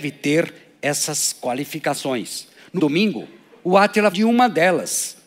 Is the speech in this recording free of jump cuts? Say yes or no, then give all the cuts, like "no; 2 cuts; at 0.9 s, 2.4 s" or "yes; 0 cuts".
no; 2 cuts; at 2.8 s, 4.1 s